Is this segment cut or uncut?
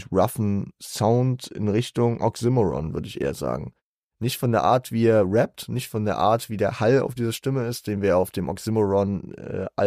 uncut